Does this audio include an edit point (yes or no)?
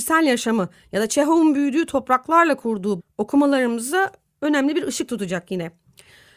yes